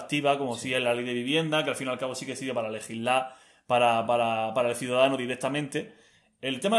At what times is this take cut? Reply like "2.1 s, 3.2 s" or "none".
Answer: none